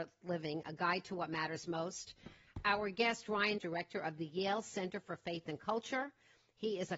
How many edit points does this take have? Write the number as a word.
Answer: one